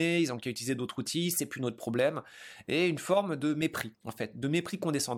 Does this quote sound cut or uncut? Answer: cut